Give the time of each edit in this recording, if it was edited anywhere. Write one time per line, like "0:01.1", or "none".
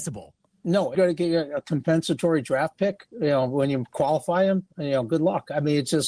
0:00.9